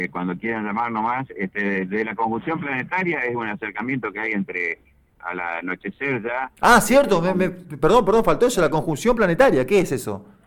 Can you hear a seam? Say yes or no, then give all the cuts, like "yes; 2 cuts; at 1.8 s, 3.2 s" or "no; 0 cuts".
no; 0 cuts